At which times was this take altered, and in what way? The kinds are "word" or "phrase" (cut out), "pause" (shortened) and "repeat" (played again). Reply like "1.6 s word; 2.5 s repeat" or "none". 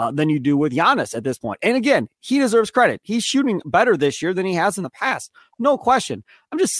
none

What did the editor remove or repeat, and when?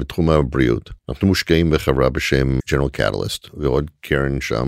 1.0 s pause; 2.6 s word

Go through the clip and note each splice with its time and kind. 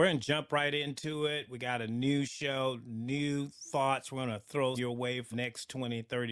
4.8 s word; 5.3 s word

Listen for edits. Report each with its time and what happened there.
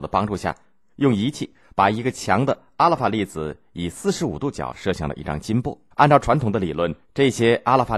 5.9 s pause; 7.0 s pause

